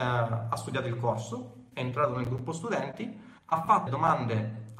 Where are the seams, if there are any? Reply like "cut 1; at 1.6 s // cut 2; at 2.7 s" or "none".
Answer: cut 1; at 3.4 s // cut 2; at 3.9 s

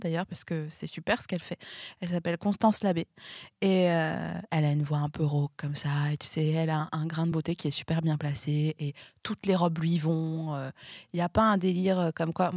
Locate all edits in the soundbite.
none

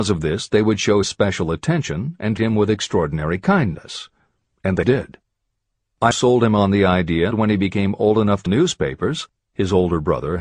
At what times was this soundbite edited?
cut 1; at 1.0 s // cut 2; at 2.4 s // cut 3; at 4.8 s // cut 4; at 6.1 s // cut 5; at 7.3 s // cut 6; at 8.5 s

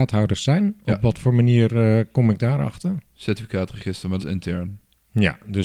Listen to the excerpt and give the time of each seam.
cut 1; at 4.2 s

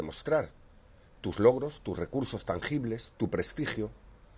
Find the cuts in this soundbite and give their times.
none

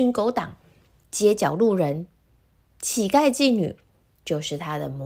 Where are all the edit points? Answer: none

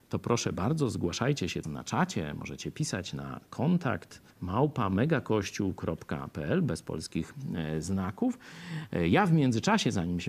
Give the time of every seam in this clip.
cut 1; at 1.6 s // cut 2; at 4.3 s

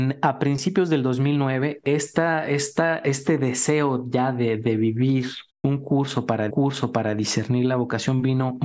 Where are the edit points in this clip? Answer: cut 1; at 5.5 s // cut 2; at 6.5 s

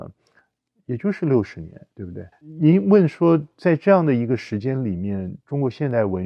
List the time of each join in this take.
cut 1; at 1.9 s // cut 2; at 2.3 s

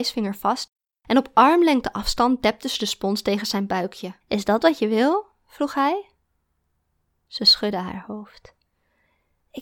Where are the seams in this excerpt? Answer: cut 1; at 4.2 s

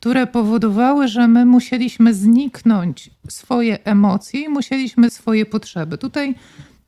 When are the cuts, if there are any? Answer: cut 1; at 5.1 s

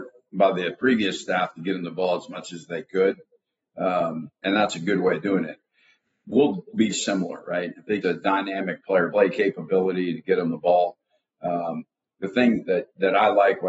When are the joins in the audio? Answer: cut 1; at 4.4 s // cut 2; at 6.9 s // cut 3; at 8.0 s // cut 4; at 9.1 s

